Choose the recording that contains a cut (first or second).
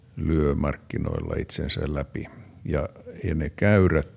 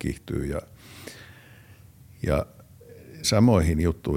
second